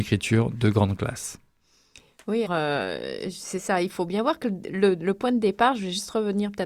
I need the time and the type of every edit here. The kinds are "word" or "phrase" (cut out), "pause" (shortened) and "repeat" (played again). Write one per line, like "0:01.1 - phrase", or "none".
0:02.5 - word
0:03.9 - word